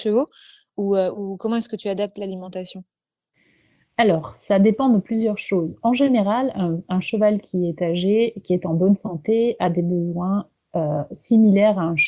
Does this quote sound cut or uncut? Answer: uncut